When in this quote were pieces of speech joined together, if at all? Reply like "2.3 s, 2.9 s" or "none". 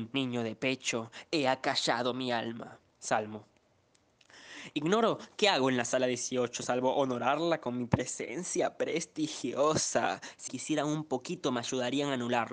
2.9 s, 10.5 s